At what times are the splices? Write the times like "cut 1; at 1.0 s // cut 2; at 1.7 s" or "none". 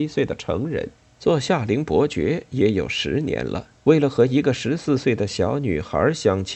cut 1; at 1.0 s // cut 2; at 3.8 s